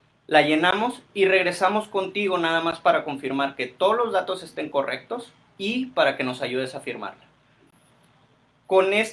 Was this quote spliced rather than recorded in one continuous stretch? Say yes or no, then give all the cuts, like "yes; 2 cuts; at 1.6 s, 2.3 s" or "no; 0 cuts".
no; 0 cuts